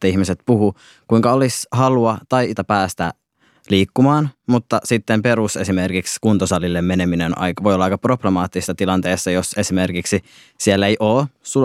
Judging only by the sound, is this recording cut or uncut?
cut